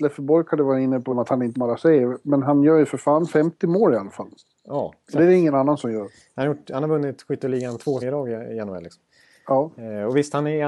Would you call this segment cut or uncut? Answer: cut